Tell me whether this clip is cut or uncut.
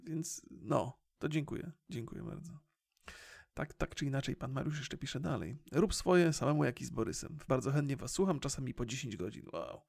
cut